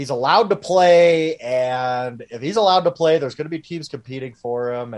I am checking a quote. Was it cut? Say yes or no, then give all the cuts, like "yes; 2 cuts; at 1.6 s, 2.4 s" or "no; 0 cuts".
no; 0 cuts